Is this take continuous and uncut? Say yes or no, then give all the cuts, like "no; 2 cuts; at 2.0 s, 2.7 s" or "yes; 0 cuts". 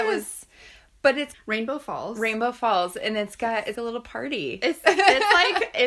no; 2 cuts; at 1.3 s, 3.7 s